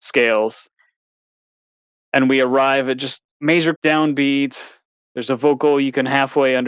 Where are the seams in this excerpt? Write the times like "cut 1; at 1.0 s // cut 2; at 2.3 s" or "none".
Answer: cut 1; at 3.8 s